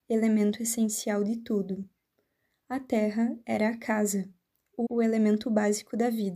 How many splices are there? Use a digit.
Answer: 1